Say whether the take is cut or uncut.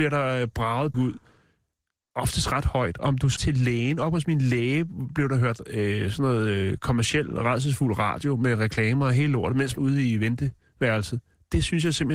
cut